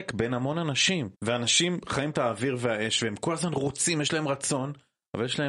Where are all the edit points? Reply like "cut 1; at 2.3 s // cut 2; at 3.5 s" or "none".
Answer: cut 1; at 1.1 s // cut 2; at 2.1 s